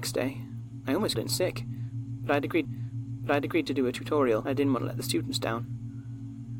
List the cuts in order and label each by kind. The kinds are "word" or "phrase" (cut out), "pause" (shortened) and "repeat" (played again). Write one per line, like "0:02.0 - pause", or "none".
0:01.1 - word
0:02.6 - repeat
0:04.4 - word